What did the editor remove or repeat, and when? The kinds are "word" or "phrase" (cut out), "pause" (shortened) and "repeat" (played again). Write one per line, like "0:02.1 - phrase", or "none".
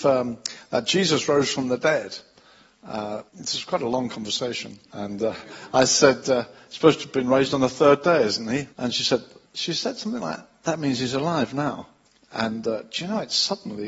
0:03.3 - pause
0:04.9 - pause
0:08.7 - pause
0:09.4 - pause
0:12.1 - pause